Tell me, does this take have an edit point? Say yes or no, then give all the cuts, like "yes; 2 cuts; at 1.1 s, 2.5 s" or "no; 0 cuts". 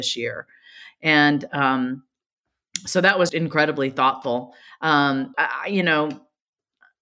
yes; 2 cuts; at 3.3 s, 5.3 s